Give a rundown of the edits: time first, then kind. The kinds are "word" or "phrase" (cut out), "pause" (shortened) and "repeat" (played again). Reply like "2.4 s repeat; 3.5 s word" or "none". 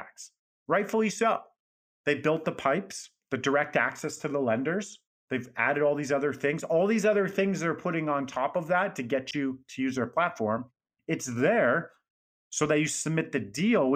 3.2 s pause; 5.1 s pause